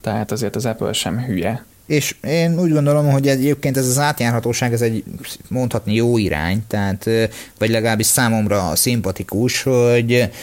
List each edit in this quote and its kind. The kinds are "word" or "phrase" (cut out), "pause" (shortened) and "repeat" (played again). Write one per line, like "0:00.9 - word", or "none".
0:01.7 - pause